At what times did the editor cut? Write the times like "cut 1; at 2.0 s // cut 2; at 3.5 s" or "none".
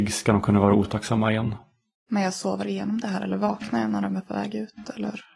none

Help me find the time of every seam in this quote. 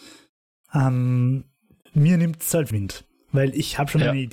cut 1; at 2.7 s

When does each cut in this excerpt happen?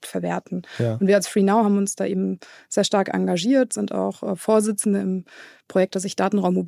none

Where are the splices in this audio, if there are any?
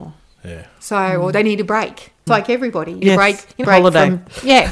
cut 1; at 2.3 s // cut 2; at 3.0 s // cut 3; at 3.6 s

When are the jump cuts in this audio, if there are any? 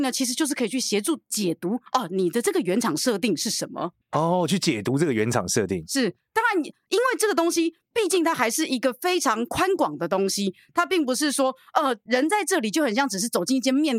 cut 1; at 1.9 s // cut 2; at 4.0 s

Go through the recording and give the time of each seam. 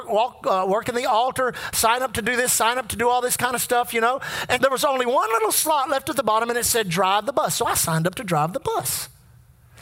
cut 1; at 4.6 s

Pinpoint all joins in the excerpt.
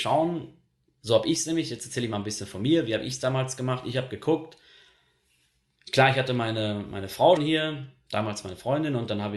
cut 1; at 7.4 s

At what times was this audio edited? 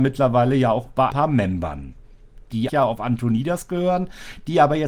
cut 1; at 1.1 s // cut 2; at 2.7 s

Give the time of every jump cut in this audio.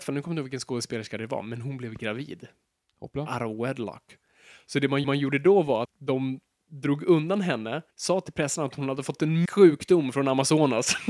cut 1; at 5.0 s // cut 2; at 5.8 s // cut 3; at 7.9 s // cut 4; at 9.4 s

